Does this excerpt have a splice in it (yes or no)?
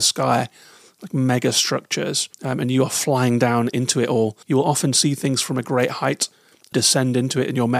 yes